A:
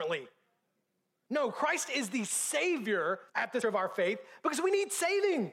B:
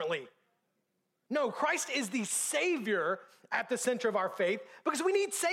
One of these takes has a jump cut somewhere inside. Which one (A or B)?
A